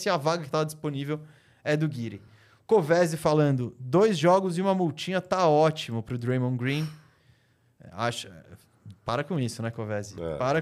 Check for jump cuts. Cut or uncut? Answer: uncut